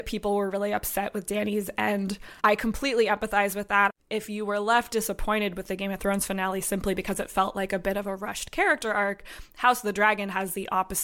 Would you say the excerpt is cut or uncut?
cut